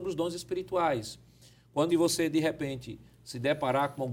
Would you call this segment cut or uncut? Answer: cut